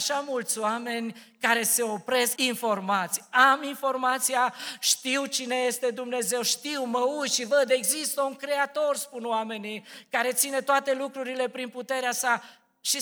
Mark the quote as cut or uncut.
cut